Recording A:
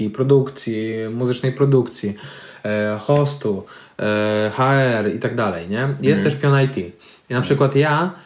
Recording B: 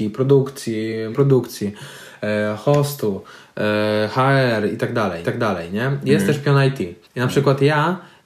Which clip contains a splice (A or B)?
B